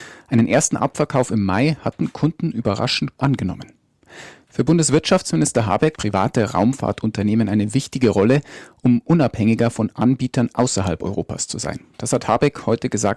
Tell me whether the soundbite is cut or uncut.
cut